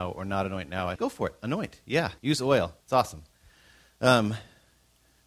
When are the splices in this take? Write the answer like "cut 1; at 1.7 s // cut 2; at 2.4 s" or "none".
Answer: cut 1; at 1.0 s // cut 2; at 2.2 s // cut 3; at 2.8 s